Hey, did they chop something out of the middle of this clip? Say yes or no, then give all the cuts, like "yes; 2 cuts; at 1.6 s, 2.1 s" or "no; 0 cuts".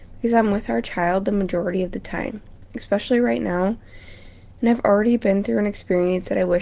no; 0 cuts